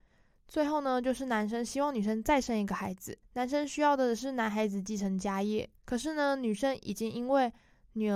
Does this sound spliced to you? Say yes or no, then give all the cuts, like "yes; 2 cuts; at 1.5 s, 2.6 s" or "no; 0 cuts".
yes; 2 cuts; at 3.2 s, 5.8 s